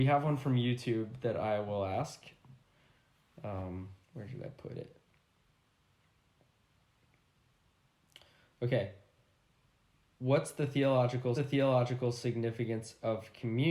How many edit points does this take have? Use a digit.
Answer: 2